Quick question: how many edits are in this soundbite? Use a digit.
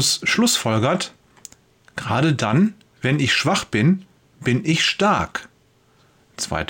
0